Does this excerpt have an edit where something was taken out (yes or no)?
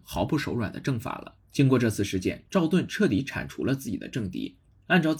yes